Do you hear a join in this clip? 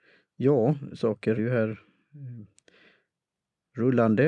yes; 1 cut; at 1.4 s

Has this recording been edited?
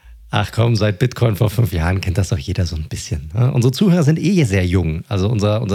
no; 0 cuts

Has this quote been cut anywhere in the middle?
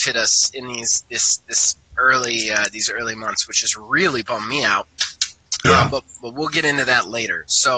no; 0 cuts

